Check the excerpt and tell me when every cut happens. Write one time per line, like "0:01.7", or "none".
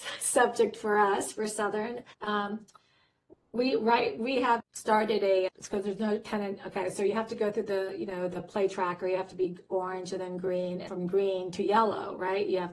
0:02.1
0:04.6
0:05.5
0:10.9